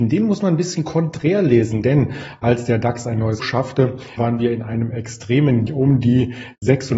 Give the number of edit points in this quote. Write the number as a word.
three